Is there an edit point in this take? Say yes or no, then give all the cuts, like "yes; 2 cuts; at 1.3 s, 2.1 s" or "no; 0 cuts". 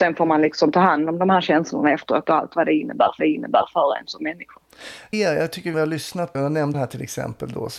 yes; 5 cuts; at 3.2 s, 5.1 s, 5.7 s, 6.3 s, 6.7 s